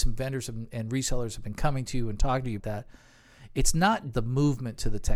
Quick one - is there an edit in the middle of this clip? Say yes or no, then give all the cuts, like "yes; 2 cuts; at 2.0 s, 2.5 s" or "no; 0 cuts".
yes; 2 cuts; at 2.6 s, 4.1 s